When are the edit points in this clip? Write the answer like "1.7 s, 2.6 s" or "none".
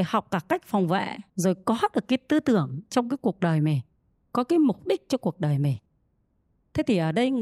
1.3 s